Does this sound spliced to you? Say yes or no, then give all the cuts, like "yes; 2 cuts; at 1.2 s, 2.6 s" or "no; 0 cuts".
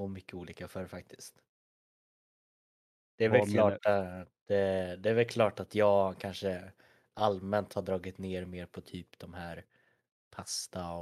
no; 0 cuts